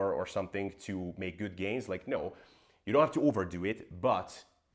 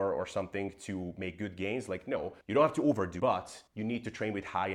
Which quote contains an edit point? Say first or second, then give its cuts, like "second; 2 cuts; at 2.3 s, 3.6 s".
second; 3 cuts; at 2.4 s, 3.2 s, 3.7 s